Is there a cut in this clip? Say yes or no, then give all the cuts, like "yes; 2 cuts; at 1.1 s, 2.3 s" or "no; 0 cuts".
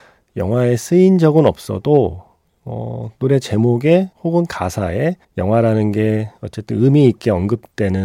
yes; 2 cuts; at 4.1 s, 5.2 s